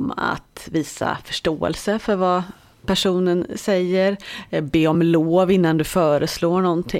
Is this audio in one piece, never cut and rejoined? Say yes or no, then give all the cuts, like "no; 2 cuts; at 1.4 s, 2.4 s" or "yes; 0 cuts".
yes; 0 cuts